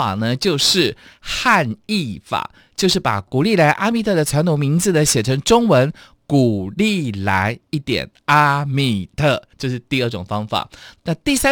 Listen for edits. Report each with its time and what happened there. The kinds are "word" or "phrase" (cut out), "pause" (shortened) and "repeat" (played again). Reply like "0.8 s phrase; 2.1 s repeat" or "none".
9.5 s pause

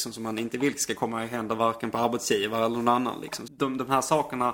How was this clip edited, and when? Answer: 3.5 s word

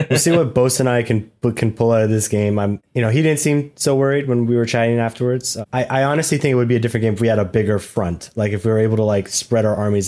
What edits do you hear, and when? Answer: none

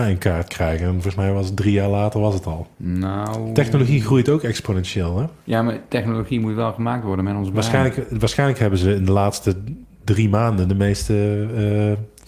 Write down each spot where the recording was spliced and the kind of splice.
2.7 s pause; 5.4 s pause

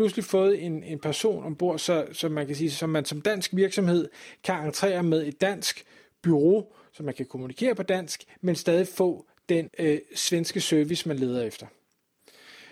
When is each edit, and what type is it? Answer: 9.7 s word

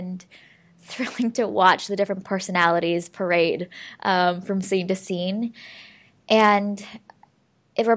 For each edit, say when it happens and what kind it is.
none

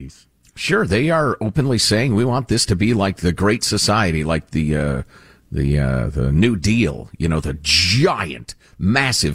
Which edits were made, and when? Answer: none

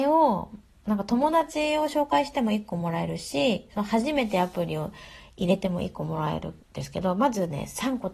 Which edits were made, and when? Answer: 6.6 s pause

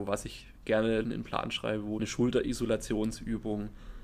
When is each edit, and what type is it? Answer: 1.0 s word; 2.0 s phrase

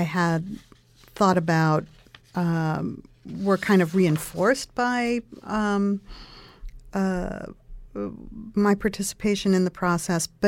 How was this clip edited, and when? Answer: none

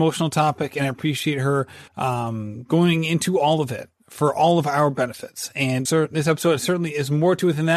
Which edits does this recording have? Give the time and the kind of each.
1.9 s pause; 5.9 s word

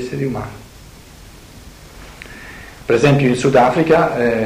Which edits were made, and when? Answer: none

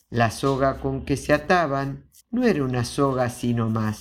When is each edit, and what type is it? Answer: 2.2 s pause

